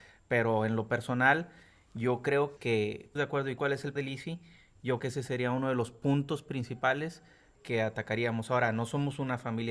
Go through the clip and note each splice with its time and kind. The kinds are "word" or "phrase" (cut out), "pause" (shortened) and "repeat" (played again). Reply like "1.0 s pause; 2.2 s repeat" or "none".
2.6 s word; 3.2 s word; 3.6 s word; 4.0 s word; 5.0 s word; 7.5 s word